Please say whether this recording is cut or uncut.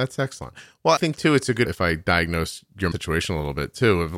cut